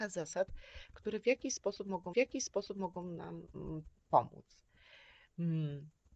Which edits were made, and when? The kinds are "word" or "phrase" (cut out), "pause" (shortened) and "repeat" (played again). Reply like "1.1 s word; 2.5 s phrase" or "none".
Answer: 2.1 s repeat